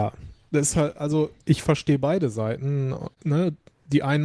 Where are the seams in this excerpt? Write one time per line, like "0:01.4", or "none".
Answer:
0:01.4
0:03.1